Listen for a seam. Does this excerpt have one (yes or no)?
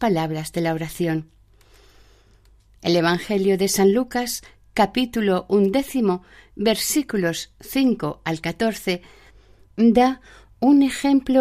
no